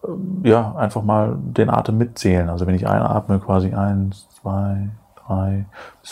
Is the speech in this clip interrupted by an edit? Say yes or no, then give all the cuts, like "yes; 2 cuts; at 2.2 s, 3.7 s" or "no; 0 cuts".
no; 0 cuts